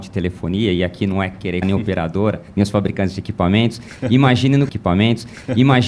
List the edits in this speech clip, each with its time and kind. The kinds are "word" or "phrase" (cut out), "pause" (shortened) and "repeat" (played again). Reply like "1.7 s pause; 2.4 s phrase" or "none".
1.6 s word; 4.7 s repeat